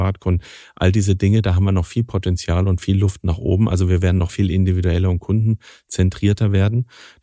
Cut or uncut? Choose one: cut